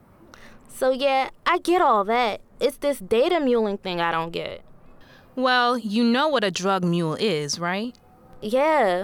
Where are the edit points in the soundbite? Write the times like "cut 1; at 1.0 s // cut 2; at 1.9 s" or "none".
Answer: none